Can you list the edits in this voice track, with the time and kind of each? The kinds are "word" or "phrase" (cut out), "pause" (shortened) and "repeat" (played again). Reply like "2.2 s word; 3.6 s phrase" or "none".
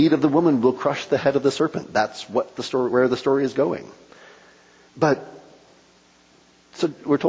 none